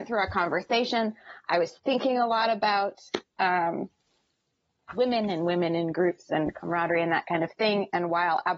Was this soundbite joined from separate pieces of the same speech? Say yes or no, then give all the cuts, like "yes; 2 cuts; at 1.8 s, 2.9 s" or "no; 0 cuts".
no; 0 cuts